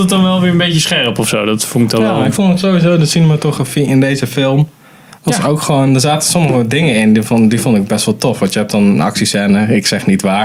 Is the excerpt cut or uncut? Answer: uncut